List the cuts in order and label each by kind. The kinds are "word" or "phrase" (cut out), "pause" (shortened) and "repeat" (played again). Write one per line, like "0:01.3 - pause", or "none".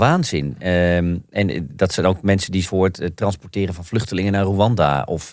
0:02.6 - word